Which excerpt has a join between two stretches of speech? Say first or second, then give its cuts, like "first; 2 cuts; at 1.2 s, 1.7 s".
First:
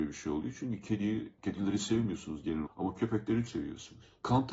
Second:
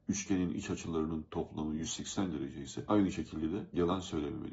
first; 3 cuts; at 1.4 s, 2.7 s, 3.5 s